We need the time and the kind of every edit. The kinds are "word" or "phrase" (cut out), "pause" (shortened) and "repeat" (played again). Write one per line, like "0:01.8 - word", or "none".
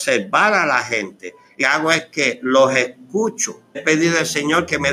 0:01.6 - word
0:03.7 - word